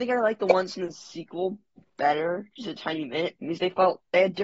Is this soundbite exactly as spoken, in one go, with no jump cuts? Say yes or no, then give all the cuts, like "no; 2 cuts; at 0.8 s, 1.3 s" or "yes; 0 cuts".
yes; 0 cuts